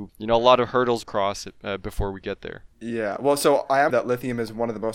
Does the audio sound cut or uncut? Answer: cut